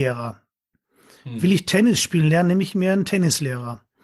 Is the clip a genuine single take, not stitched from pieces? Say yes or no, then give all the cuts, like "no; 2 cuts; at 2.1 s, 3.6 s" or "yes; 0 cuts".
yes; 0 cuts